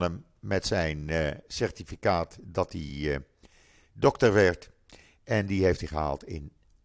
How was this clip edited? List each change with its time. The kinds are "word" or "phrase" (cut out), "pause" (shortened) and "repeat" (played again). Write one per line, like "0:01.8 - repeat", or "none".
none